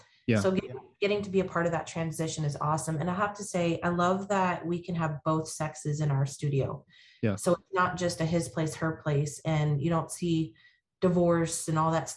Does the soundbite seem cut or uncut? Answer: uncut